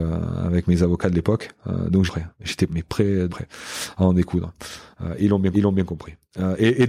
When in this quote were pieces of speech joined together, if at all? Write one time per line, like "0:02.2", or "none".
0:02.1
0:02.7
0:03.3
0:05.5

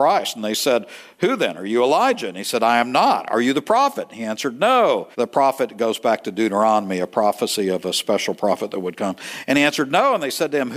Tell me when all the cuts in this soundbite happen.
0:05.1

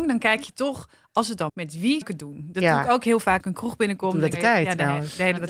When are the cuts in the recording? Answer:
0:01.1
0:01.5
0:02.0
0:03.4
0:04.3

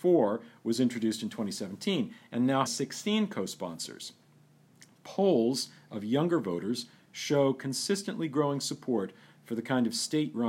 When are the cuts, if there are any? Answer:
0:02.7

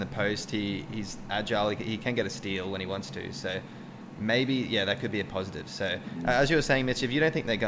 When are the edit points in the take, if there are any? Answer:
none

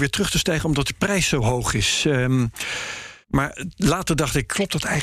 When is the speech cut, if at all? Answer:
0:03.2

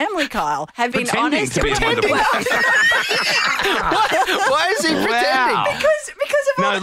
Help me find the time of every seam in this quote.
0:00.9

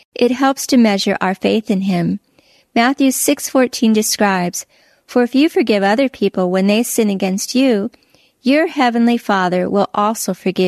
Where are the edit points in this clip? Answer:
none

